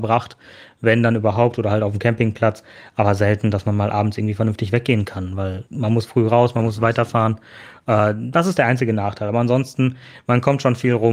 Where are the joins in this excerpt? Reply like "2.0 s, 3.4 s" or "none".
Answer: 5.7 s